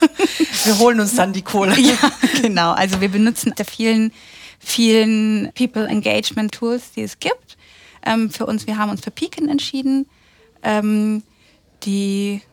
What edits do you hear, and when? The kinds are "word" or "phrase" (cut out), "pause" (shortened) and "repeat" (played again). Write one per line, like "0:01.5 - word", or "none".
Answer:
0:03.5 - word
0:05.5 - word
0:06.5 - word